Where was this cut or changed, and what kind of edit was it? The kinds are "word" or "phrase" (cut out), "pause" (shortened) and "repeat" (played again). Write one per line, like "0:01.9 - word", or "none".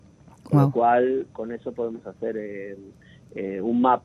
none